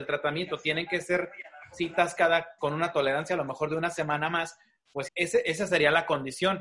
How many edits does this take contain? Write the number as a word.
two